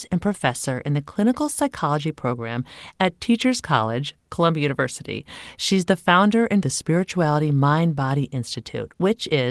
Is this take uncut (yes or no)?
no